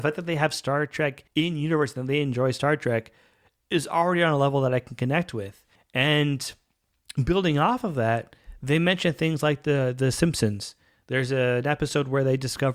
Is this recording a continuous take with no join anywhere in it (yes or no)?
no